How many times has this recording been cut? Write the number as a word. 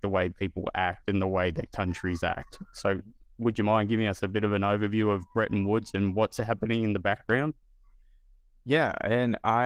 zero